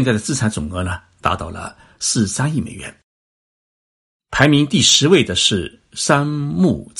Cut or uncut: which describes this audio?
uncut